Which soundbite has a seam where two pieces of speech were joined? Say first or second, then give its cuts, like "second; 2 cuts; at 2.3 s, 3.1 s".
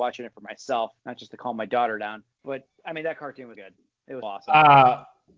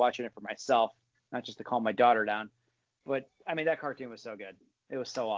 first; 4 cuts; at 1.0 s, 2.3 s, 3.5 s, 4.2 s